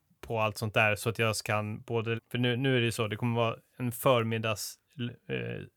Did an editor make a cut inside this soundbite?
yes; 1 cut; at 2.2 s

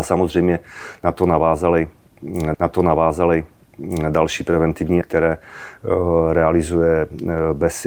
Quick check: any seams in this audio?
yes; 2 cuts; at 2.5 s, 5.0 s

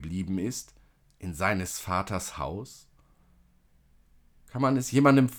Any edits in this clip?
no; 0 cuts

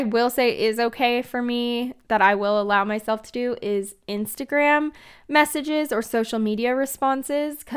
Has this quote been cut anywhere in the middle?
no; 0 cuts

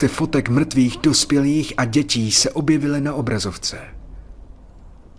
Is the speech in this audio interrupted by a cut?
no; 0 cuts

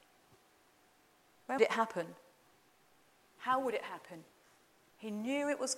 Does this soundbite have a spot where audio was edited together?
yes; 1 cut; at 1.6 s

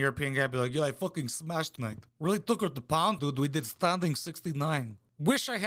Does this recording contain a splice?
yes; 3 cuts; at 1.8 s, 2.1 s, 3.2 s

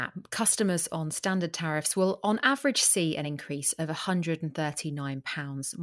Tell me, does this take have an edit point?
no; 0 cuts

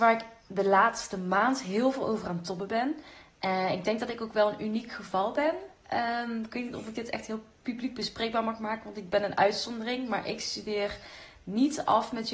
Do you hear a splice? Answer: no; 0 cuts

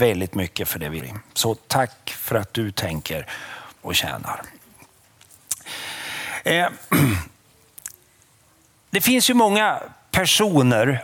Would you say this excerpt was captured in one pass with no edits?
no; 2 cuts; at 1.0 s, 3.8 s

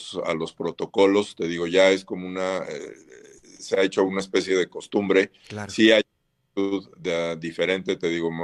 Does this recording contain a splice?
no; 0 cuts

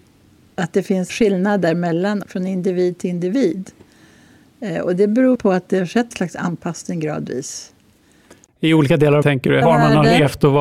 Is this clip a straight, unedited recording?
no; 6 cuts; at 1.1 s, 2.2 s, 5.3 s, 6.1 s, 9.2 s, 9.6 s

